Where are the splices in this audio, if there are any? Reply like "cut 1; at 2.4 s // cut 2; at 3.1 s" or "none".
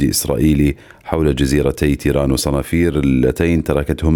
none

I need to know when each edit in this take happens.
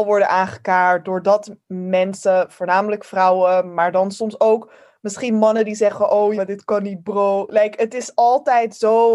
cut 1; at 6.4 s

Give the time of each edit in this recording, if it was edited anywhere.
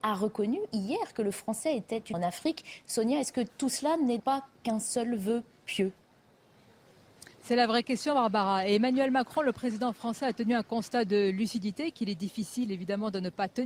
cut 1; at 2.1 s // cut 2; at 4.2 s // cut 3; at 7.4 s

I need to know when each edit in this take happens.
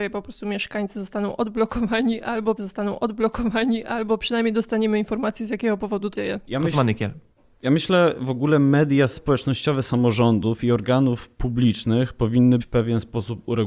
cut 1; at 2.6 s // cut 2; at 6.1 s // cut 3; at 12.6 s

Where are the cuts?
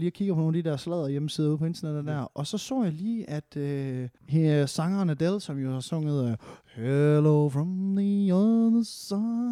cut 1; at 4.2 s

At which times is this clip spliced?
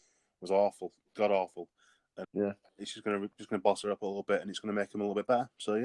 cut 1; at 2.2 s

